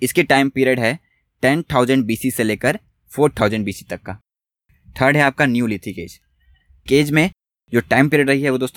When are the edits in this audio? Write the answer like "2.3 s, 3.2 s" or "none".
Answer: 6.9 s